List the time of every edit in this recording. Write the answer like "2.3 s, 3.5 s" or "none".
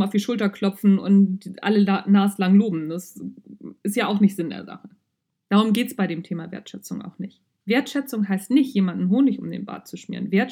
none